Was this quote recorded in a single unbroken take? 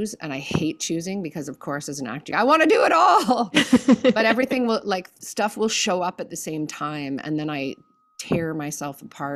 no; 1 cut; at 2.3 s

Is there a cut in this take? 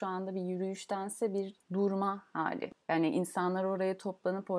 yes; 1 cut; at 2.8 s

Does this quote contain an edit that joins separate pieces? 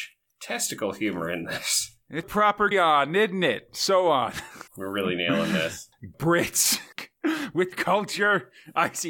yes; 6 cuts; at 2.2 s, 2.7 s, 4.7 s, 6.1 s, 6.9 s, 7.7 s

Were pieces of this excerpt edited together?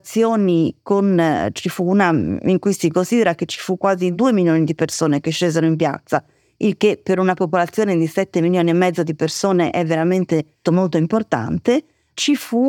yes; 1 cut; at 10.6 s

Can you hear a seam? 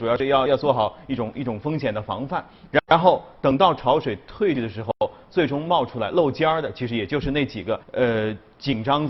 yes; 1 cut; at 7.8 s

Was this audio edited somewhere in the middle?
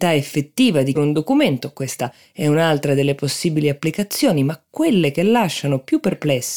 yes; 1 cut; at 1.0 s

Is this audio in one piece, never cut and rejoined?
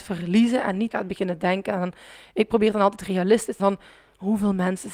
no; 2 cuts; at 0.9 s, 3.6 s

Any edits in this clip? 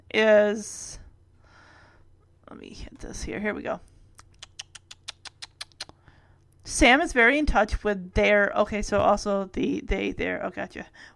no; 0 cuts

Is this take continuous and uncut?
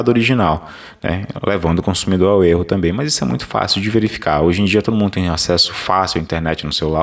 yes; 0 cuts

